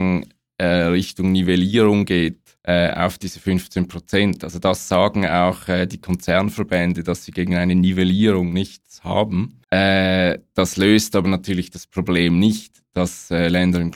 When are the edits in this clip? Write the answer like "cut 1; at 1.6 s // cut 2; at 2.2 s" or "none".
cut 1; at 2.6 s // cut 2; at 9.6 s